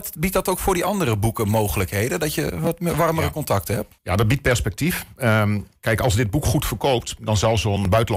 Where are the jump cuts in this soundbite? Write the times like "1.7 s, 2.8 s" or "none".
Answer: 4.0 s, 5.8 s